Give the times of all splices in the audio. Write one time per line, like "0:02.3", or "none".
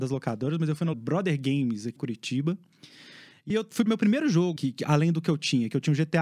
0:00.9
0:02.0
0:03.5
0:03.9
0:04.6